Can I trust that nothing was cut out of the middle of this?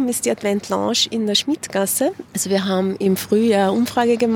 yes; 0 cuts

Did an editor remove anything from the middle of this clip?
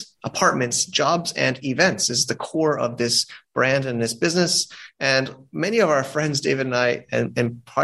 no; 0 cuts

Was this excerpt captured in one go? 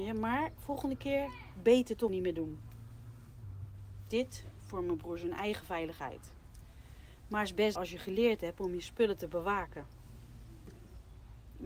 no; 2 cuts; at 2.1 s, 7.8 s

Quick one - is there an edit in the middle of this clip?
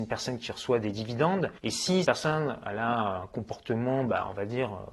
yes; 2 cuts; at 1.6 s, 2.0 s

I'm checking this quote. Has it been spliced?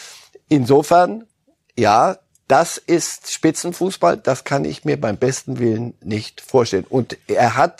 no; 0 cuts

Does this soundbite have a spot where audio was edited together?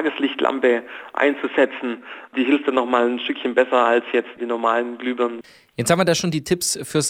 no; 0 cuts

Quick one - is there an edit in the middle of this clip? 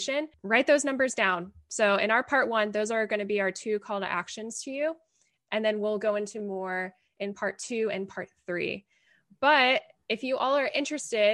no; 0 cuts

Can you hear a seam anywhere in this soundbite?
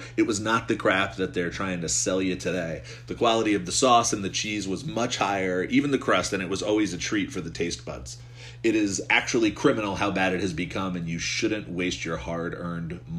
no; 0 cuts

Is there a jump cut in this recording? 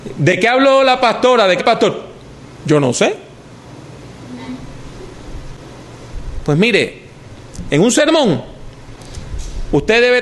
yes; 1 cut; at 1.6 s

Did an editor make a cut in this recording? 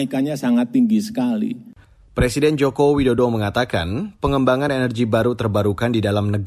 no; 0 cuts

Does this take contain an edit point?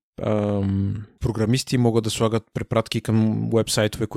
no; 0 cuts

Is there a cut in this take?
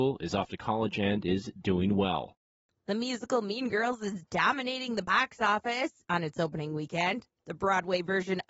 no; 0 cuts

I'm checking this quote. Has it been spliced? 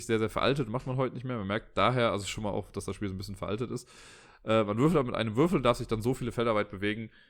no; 0 cuts

